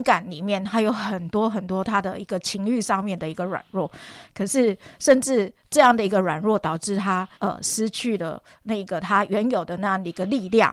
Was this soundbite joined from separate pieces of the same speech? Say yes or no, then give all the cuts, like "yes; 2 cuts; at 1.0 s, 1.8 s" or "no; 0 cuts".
yes; 1 cut; at 7.3 s